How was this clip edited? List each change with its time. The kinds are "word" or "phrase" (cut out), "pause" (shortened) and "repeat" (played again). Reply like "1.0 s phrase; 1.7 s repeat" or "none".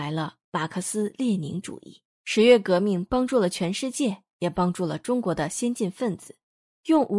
2.1 s pause